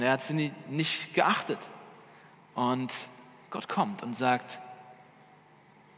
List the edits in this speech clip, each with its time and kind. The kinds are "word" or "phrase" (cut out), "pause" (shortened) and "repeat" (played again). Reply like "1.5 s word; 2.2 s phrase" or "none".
none